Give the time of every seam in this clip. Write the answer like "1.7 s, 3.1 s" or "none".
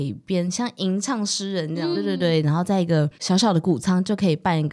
1.9 s, 3.1 s